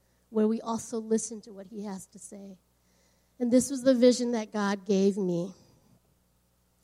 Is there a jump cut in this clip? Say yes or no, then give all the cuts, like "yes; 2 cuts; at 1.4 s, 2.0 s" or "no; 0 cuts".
no; 0 cuts